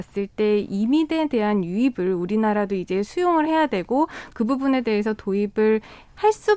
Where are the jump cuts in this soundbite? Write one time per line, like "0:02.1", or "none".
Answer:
none